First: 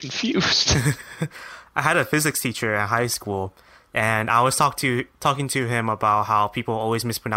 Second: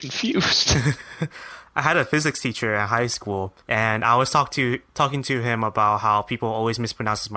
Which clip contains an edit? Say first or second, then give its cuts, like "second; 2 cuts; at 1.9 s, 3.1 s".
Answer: second; 1 cut; at 3.6 s